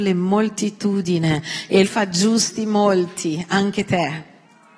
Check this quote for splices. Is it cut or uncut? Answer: cut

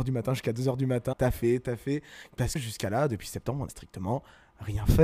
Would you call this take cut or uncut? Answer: cut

